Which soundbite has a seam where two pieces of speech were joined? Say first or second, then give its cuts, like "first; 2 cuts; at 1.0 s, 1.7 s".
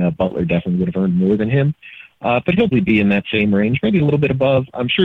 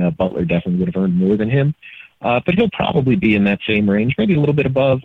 first; 1 cut; at 2.7 s